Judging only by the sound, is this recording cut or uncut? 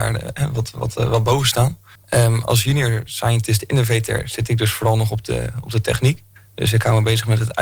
cut